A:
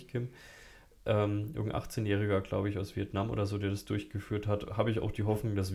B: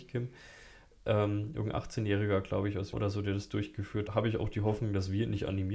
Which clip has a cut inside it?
B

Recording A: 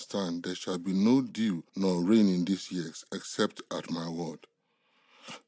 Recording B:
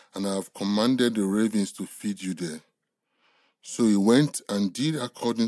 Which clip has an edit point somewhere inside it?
A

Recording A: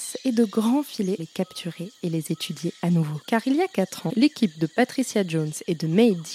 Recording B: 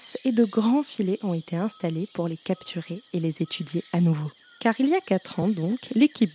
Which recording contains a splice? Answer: A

